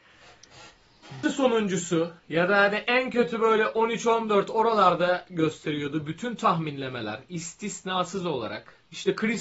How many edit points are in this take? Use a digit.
2